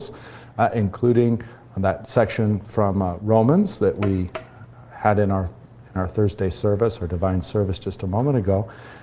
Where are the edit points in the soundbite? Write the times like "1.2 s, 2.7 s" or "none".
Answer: none